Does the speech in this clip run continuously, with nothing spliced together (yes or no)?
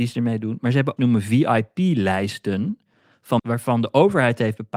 no